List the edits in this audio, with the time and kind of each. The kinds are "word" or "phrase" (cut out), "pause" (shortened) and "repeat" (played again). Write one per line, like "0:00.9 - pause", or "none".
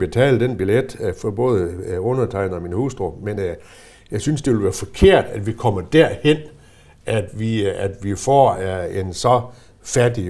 none